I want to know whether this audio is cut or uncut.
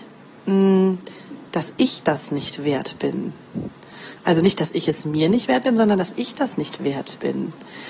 uncut